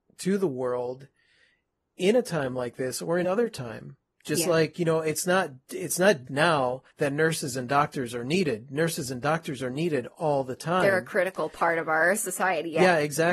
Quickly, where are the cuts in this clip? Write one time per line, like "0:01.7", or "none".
0:03.2
0:06.3
0:06.9

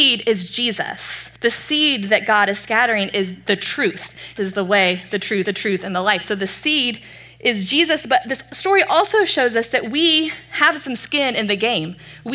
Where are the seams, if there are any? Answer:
0:01.4
0:04.4
0:05.4

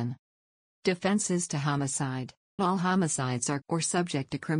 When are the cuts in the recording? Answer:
0:02.6
0:03.6

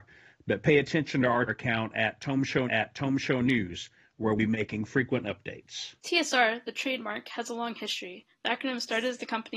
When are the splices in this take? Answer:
0:01.5
0:02.7
0:04.4
0:06.0

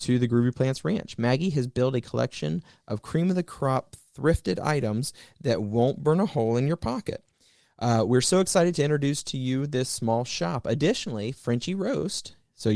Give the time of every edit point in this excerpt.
none

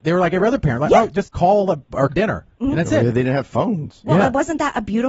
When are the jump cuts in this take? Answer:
0:01.2
0:02.1

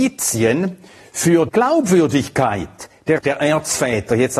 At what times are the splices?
0:01.5
0:03.2

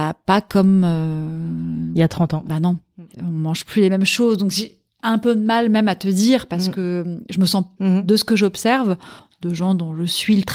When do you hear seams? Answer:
0:03.1
0:07.8

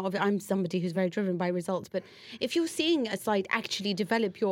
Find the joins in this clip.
none

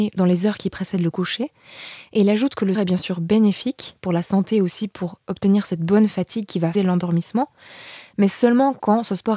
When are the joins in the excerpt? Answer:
0:02.7
0:06.7

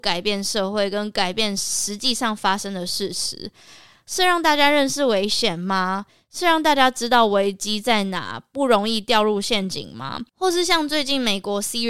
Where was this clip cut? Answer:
0:10.3

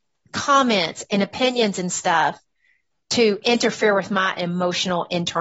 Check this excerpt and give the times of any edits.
none

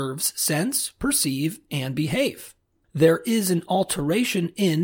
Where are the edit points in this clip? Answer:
none

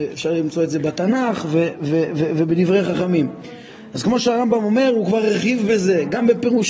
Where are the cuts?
none

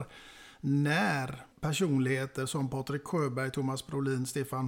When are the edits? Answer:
0:01.5

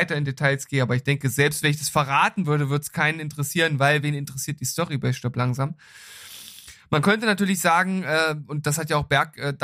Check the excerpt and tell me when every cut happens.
none

